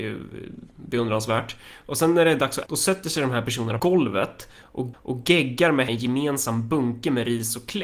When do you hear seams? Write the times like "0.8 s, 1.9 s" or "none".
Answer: 2.7 s, 3.8 s, 4.9 s, 5.9 s